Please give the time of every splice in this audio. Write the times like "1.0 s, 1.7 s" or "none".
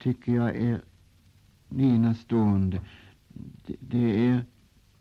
1.7 s